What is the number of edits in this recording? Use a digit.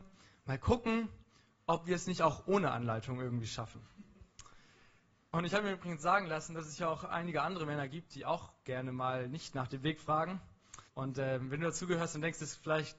1